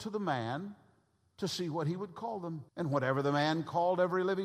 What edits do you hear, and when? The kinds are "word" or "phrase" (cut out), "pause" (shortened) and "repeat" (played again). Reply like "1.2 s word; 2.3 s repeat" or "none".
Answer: 2.7 s pause